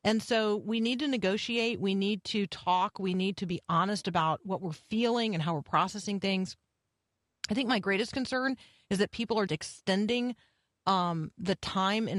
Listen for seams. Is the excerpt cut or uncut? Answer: cut